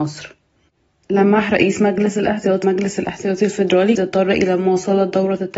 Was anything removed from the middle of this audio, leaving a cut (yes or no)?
yes